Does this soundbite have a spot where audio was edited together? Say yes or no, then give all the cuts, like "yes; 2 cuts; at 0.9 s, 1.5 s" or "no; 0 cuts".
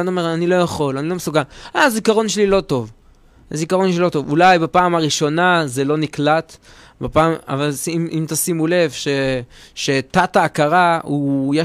no; 0 cuts